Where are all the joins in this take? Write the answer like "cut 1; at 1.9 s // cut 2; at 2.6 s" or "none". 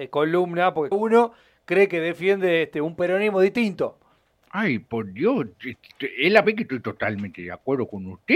cut 1; at 0.9 s // cut 2; at 6.4 s